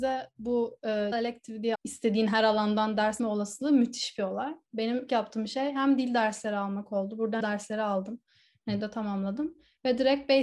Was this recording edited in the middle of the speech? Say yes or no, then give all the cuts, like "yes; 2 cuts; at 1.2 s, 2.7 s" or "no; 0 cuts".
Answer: yes; 6 cuts; at 1.1 s, 1.7 s, 3.2 s, 5.1 s, 7.4 s, 8.8 s